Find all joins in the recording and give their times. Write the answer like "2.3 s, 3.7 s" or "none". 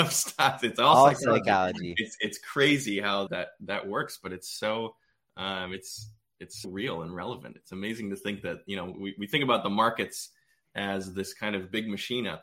3.3 s, 6.6 s